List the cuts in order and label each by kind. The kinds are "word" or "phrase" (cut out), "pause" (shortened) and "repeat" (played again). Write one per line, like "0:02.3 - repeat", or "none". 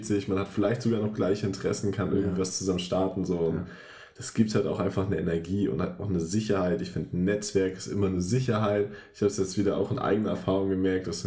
none